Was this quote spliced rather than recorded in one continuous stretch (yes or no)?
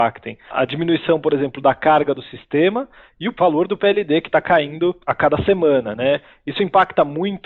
no